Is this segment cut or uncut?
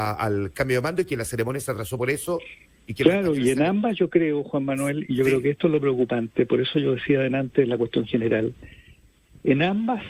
uncut